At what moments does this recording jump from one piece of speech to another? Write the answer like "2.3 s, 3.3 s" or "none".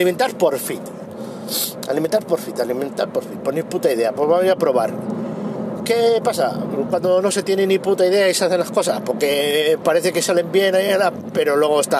9.8 s